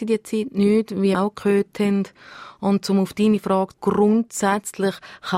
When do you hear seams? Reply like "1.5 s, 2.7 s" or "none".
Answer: 1.1 s, 3.7 s

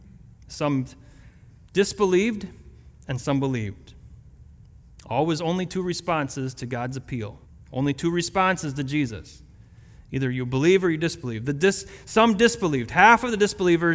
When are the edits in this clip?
7.5 s

